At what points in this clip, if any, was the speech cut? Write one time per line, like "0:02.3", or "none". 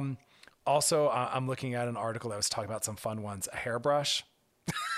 none